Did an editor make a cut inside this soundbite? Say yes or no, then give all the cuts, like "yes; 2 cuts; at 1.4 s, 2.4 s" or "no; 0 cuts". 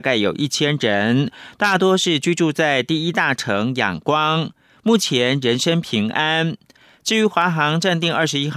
no; 0 cuts